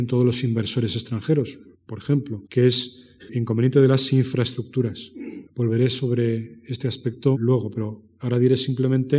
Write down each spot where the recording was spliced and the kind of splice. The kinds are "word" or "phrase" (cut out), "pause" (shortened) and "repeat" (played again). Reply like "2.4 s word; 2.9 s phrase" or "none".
1.7 s pause; 2.5 s pause; 3.3 s word; 5.5 s pause; 7.4 s word